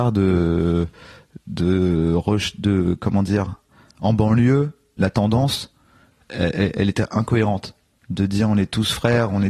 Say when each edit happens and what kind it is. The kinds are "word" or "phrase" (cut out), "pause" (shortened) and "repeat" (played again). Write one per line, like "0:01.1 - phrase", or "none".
none